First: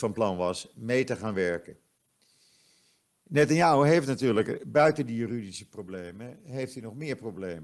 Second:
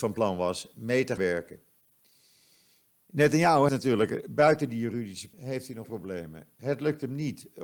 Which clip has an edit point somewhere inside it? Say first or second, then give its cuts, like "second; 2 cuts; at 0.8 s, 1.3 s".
second; 4 cuts; at 1.2 s, 3.7 s, 5.3 s, 5.8 s